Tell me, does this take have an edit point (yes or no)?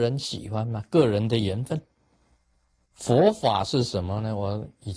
no